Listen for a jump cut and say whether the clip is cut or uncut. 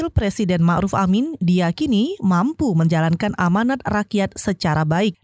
uncut